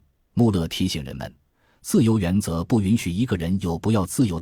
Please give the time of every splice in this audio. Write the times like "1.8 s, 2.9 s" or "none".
none